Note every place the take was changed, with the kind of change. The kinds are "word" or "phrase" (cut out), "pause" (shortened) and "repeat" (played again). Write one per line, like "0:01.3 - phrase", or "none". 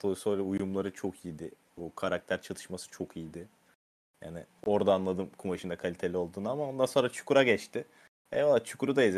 none